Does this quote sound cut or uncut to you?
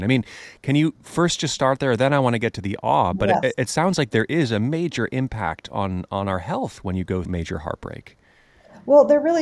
cut